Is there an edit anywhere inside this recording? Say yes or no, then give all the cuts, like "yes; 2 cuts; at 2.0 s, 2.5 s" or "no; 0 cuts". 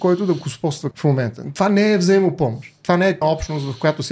yes; 2 cuts; at 0.9 s, 3.2 s